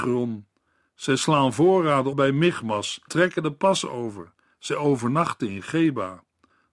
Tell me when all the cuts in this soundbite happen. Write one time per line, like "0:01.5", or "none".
0:02.1
0:03.1